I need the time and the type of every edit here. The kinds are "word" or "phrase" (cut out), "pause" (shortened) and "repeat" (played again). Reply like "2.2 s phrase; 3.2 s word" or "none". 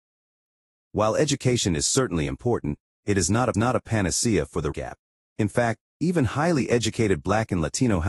3.5 s repeat; 4.7 s phrase

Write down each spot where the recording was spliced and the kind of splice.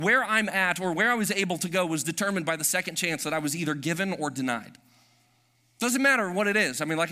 none

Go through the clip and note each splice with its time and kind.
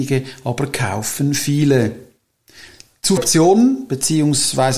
3.2 s word

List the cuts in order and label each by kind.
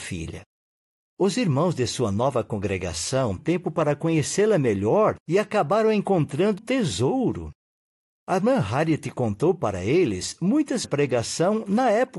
3.4 s word; 5.2 s pause; 6.6 s word; 10.8 s phrase

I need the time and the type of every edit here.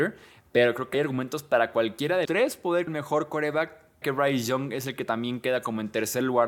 0.9 s word; 2.2 s word; 2.9 s word; 4.0 s word

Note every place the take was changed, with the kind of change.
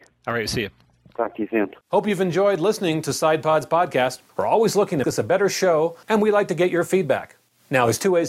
1.8 s pause; 4.3 s pause; 5.0 s word

